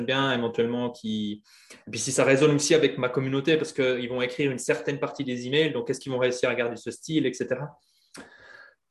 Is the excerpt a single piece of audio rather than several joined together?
yes; 0 cuts

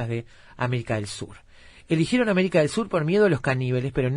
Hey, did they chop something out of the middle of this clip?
no; 0 cuts

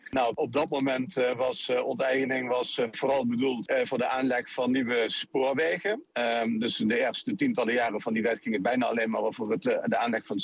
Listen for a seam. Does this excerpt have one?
no; 0 cuts

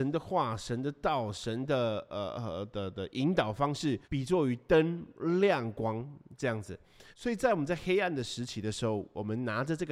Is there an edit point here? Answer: yes; 2 cuts; at 4.0 s, 7.1 s

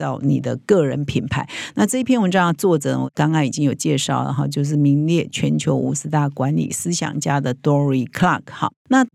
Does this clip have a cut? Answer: no; 0 cuts

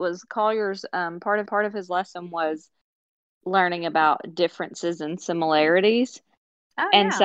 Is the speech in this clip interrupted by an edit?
yes; 1 cut; at 1.5 s

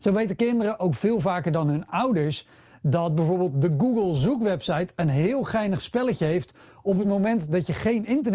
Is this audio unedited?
yes; 0 cuts

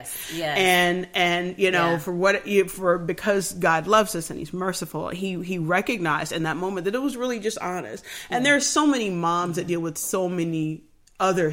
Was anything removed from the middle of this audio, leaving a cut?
no; 0 cuts

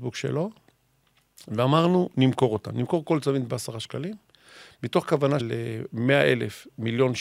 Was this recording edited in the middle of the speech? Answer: yes; 1 cut; at 5.4 s

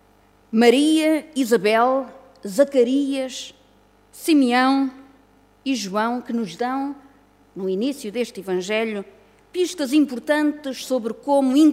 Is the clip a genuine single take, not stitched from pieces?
yes; 0 cuts

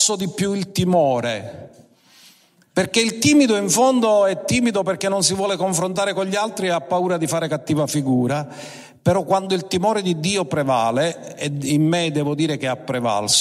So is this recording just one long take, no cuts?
yes; 0 cuts

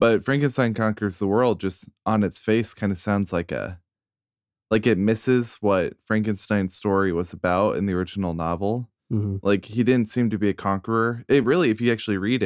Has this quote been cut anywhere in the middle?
no; 0 cuts

